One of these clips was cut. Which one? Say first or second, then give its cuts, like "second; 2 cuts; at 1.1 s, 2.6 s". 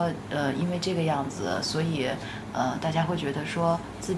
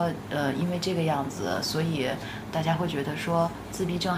second; 1 cut; at 2.5 s